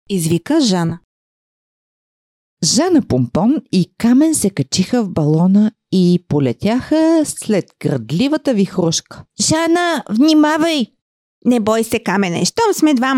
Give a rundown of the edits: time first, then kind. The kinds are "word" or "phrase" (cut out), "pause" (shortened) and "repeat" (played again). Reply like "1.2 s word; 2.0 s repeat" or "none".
9.3 s pause